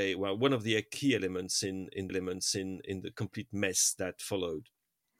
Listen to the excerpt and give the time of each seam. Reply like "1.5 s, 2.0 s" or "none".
2.1 s, 4.2 s